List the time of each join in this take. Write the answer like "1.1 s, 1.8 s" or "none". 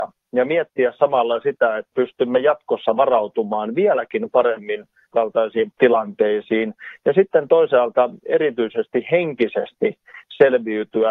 1.9 s, 5.1 s, 5.7 s

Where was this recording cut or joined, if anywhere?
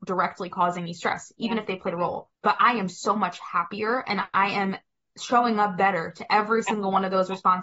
2.4 s

